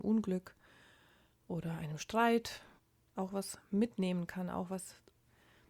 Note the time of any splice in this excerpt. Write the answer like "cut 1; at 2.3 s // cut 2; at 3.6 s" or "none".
none